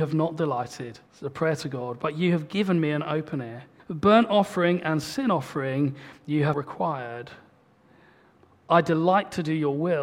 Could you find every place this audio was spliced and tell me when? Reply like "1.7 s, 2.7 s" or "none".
1.1 s, 3.8 s, 6.5 s

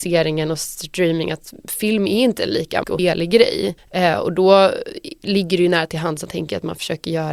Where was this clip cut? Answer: 2.8 s, 3.8 s, 6.3 s

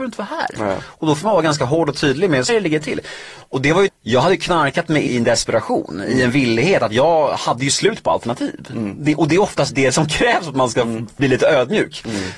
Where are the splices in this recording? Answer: 2.5 s, 3.9 s, 5.1 s, 9.7 s, 11.2 s

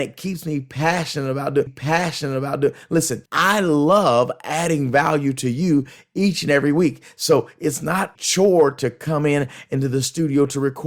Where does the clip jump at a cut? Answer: 1.7 s, 3.3 s, 8.1 s

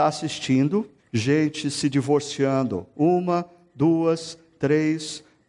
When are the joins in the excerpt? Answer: 1.0 s

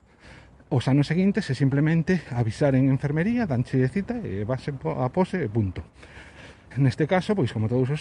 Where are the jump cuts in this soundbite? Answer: none

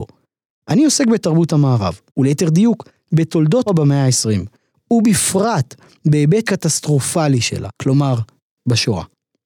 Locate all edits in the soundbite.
2.1 s, 3.7 s, 6.4 s, 7.8 s

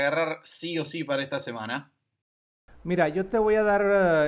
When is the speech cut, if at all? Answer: none

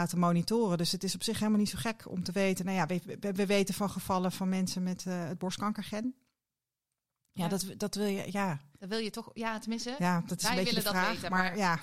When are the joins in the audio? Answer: none

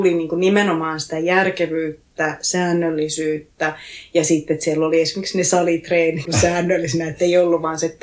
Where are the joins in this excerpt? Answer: 6.2 s

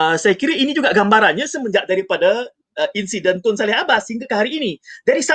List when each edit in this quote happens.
none

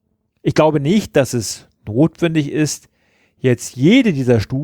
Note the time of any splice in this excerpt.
none

